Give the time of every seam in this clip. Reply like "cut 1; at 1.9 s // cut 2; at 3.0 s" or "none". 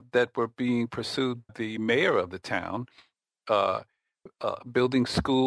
cut 1; at 1.5 s